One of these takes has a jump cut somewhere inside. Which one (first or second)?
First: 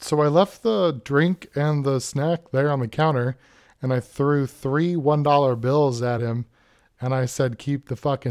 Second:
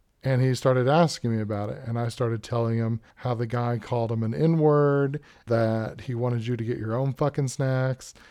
second